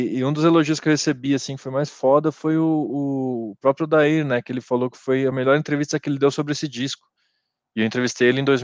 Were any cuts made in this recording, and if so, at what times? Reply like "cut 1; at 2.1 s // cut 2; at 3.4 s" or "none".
none